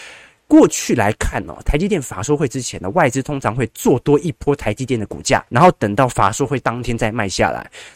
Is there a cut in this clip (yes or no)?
yes